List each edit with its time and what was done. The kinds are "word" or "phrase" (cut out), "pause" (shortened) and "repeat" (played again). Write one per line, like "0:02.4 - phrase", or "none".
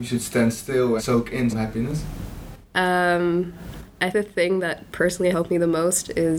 0:01.0 - word
0:01.5 - word
0:04.1 - word
0:05.3 - word